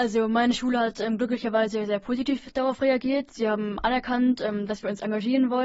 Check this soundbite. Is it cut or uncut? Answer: uncut